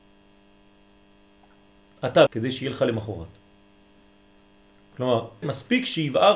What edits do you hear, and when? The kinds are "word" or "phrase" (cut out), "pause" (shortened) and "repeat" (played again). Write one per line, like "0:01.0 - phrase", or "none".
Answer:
0:02.3 - word
0:05.4 - word